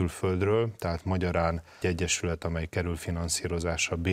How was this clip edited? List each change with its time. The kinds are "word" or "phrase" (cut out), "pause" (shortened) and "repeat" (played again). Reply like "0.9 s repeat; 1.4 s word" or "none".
1.8 s word; 2.7 s word